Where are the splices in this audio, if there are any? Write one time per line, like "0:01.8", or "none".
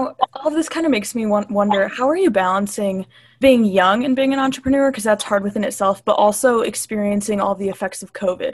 0:03.4